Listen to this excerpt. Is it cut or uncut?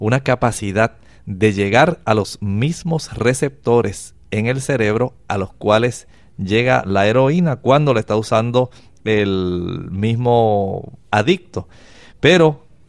uncut